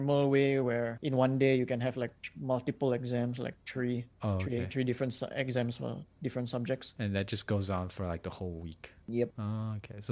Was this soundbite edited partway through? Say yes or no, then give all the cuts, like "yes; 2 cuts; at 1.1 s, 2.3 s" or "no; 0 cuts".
no; 0 cuts